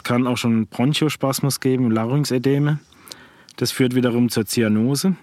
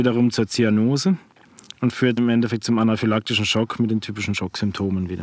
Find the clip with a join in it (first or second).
second